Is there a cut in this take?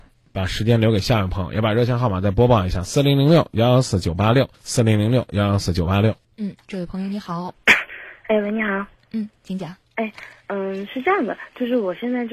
yes; 4 cuts; at 4.5 s, 6.2 s, 9.0 s, 9.8 s

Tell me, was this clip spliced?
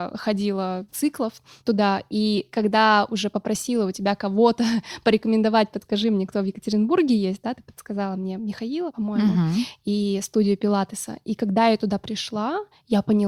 no; 0 cuts

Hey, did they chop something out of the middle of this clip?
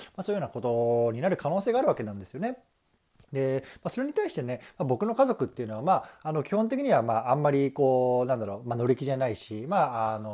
yes; 1 cut; at 3.3 s

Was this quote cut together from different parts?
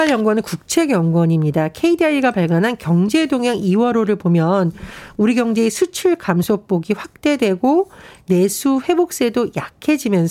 no; 0 cuts

